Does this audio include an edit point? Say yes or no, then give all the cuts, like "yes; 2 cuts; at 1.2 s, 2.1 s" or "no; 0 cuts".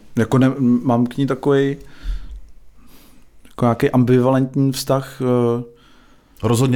no; 0 cuts